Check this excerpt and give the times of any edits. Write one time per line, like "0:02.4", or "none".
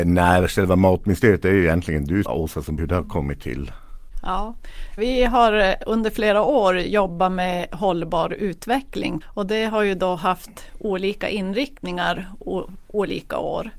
0:02.2
0:02.8
0:05.0
0:09.2